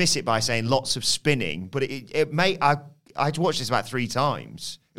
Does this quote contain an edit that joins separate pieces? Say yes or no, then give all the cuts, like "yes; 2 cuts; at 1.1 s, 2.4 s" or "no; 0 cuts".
no; 0 cuts